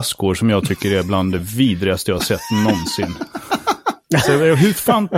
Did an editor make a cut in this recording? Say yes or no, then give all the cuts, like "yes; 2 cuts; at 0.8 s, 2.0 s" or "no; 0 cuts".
no; 0 cuts